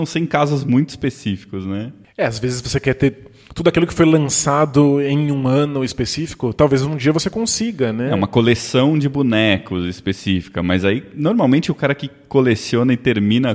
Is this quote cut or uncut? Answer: uncut